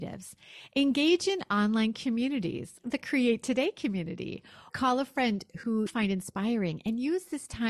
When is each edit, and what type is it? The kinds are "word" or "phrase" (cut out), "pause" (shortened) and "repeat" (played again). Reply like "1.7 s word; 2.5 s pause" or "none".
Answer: 2.8 s word; 4.7 s word; 5.9 s word